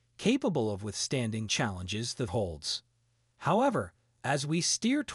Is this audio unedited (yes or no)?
no